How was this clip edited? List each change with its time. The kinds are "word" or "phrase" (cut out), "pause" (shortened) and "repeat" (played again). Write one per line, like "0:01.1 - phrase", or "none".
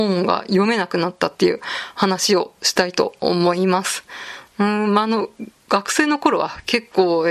0:05.6 - pause